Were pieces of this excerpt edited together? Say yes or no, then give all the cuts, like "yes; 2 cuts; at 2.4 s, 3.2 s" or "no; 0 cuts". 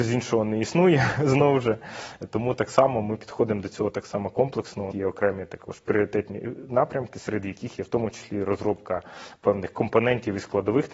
yes; 1 cut; at 4.9 s